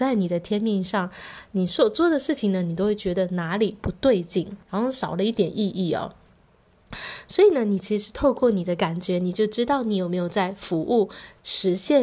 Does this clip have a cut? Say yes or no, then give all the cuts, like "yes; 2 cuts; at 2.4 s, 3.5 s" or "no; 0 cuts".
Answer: yes; 1 cut; at 4.6 s